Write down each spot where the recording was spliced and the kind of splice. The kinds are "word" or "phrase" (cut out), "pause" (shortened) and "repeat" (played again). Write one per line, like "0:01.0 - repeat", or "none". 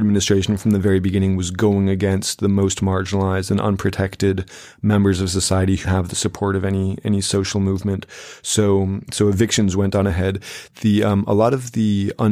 0:05.8 - word